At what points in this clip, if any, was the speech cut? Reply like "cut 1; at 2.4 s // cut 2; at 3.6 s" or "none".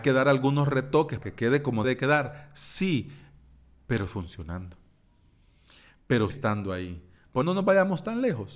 cut 1; at 1.2 s // cut 2; at 1.8 s // cut 3; at 4.1 s // cut 4; at 6.3 s // cut 5; at 7.4 s